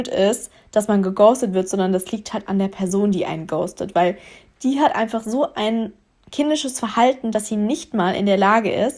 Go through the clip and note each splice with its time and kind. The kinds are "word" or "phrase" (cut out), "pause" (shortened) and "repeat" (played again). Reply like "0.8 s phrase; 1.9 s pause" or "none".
none